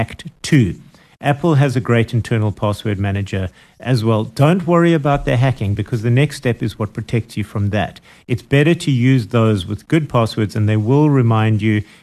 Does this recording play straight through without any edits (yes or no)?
yes